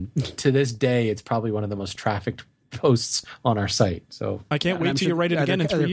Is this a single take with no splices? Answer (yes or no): yes